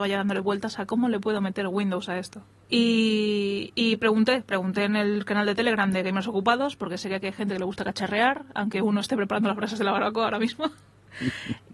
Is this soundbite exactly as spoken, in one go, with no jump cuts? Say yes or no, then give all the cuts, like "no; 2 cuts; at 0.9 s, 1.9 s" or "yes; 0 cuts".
no; 1 cut; at 2.6 s